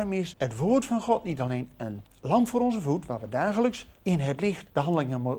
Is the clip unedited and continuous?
yes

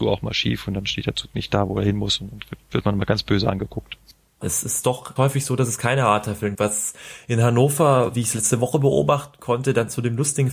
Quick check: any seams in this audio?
yes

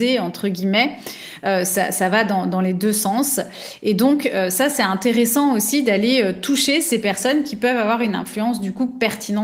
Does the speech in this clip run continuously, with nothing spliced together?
yes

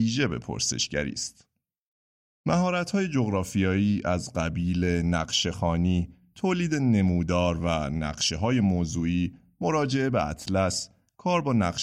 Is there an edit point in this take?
no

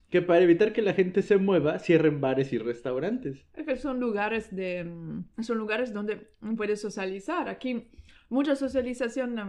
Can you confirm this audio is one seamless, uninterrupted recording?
no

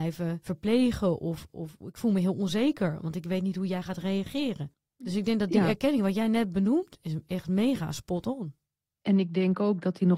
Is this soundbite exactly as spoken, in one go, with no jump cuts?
yes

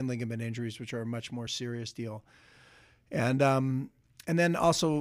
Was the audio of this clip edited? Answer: no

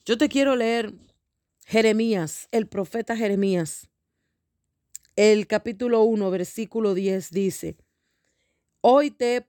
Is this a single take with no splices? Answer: yes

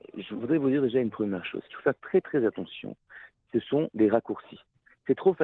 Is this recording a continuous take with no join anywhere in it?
yes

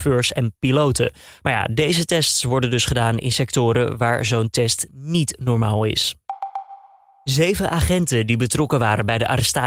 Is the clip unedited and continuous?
yes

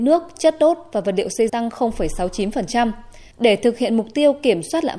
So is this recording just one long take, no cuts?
no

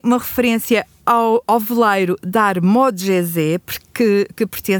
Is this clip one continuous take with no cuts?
yes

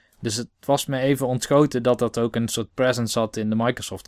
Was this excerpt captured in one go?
yes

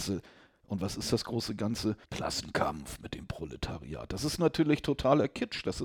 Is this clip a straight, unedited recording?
no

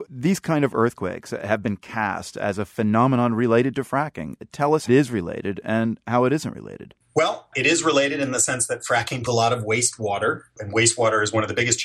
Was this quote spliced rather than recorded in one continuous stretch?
yes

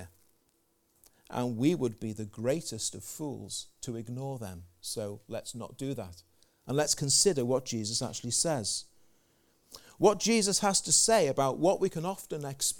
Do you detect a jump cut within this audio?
no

